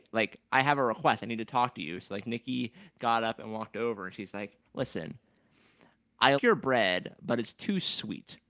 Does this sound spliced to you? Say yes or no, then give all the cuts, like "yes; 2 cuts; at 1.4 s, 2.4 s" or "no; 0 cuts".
yes; 2 cuts; at 4.7 s, 6.4 s